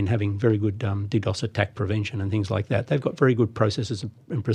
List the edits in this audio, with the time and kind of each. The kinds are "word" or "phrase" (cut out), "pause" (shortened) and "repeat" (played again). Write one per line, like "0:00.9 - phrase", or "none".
none